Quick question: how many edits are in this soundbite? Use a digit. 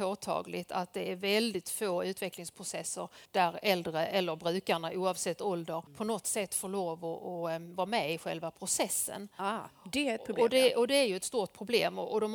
2